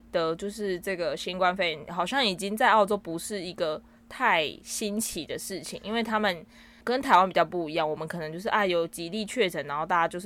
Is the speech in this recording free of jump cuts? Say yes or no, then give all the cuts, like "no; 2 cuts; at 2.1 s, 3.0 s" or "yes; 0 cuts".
yes; 0 cuts